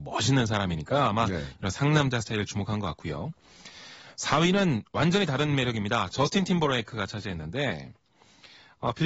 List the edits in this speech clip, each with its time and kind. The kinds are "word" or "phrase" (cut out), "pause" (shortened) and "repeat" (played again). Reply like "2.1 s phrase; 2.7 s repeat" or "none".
none